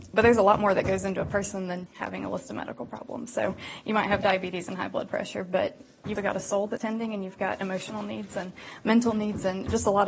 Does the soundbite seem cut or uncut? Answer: cut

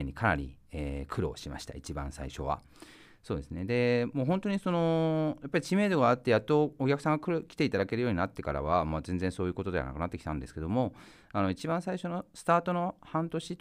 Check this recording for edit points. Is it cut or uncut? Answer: uncut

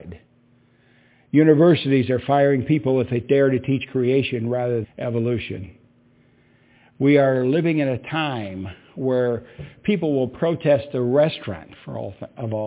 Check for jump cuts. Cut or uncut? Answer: cut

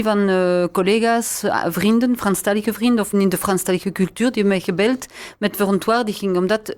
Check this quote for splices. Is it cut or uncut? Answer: cut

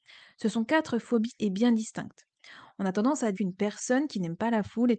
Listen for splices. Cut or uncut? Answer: cut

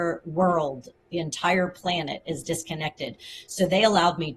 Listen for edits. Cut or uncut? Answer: uncut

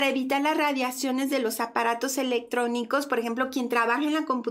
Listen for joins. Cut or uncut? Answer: uncut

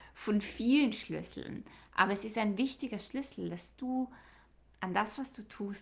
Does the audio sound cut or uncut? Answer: uncut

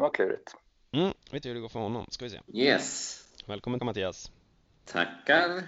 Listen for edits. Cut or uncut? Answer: cut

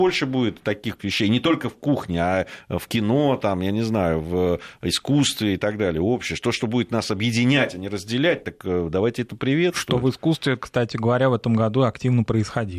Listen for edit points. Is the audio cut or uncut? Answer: cut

